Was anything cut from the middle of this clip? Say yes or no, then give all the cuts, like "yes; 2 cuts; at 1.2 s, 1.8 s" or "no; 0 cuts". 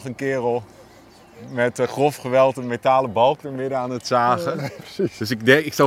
yes; 1 cut; at 4.8 s